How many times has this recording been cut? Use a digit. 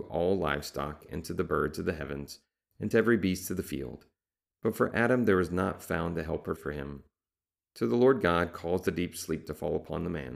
1